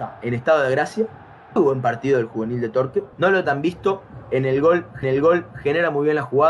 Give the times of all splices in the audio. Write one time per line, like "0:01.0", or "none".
0:01.6
0:03.1
0:03.4
0:05.0